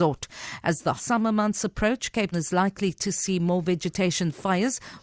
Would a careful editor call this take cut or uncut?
cut